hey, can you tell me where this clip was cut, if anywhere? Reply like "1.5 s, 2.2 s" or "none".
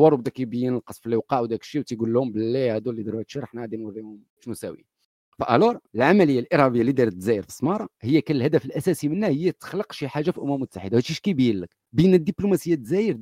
4.3 s, 5.9 s, 11.9 s